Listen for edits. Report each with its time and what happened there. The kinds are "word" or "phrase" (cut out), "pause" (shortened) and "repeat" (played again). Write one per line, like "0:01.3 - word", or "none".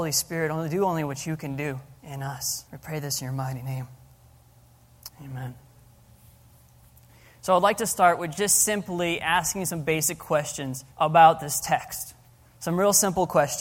0:02.0 - pause
0:02.7 - pause
0:05.1 - pause
0:10.9 - pause